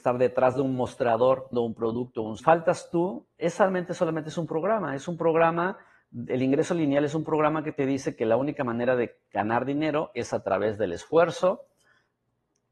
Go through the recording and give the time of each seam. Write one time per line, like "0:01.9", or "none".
0:01.5
0:02.4